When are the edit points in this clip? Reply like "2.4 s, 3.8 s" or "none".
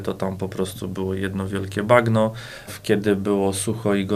2.7 s